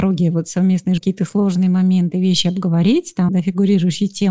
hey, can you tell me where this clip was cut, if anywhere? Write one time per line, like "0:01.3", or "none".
0:01.0
0:03.3

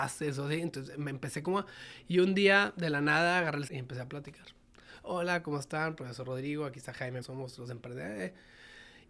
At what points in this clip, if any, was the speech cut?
0:03.7
0:07.2

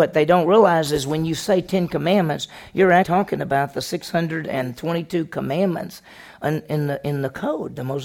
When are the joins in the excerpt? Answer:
0:03.0

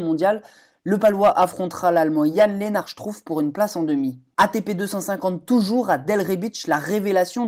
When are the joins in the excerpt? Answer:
none

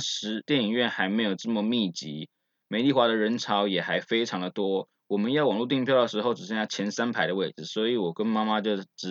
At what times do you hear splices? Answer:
none

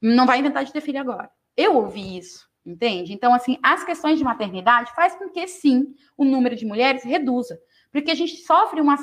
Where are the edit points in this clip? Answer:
0:02.6

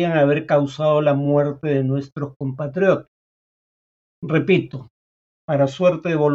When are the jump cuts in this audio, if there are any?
none

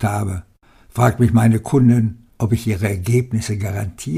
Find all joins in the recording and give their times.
0:02.3

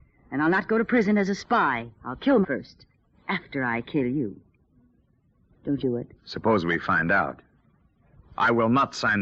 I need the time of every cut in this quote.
0:01.9
0:02.4
0:05.8
0:06.2

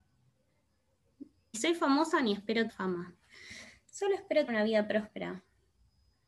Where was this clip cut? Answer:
0:01.5
0:02.7
0:04.5

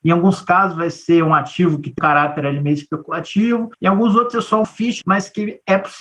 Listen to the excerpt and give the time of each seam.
0:02.0
0:03.7
0:04.6
0:05.0

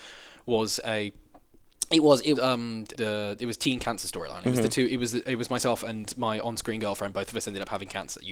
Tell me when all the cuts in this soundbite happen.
0:02.3
0:02.9

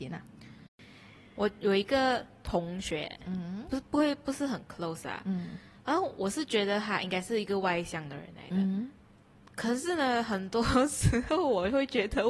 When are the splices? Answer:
none

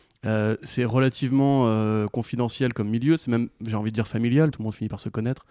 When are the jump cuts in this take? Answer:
0:04.5

